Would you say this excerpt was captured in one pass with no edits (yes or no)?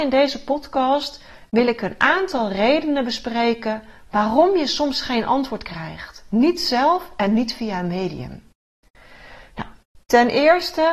yes